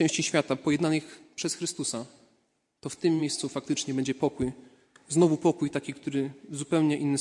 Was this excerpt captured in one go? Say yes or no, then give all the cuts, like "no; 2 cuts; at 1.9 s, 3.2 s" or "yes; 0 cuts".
yes; 0 cuts